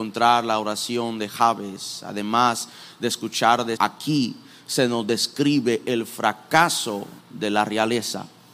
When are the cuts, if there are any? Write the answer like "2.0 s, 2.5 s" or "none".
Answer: 3.8 s, 7.2 s